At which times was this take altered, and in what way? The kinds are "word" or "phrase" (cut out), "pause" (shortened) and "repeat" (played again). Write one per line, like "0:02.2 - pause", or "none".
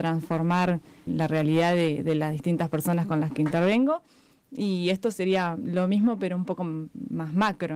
0:01.1 - word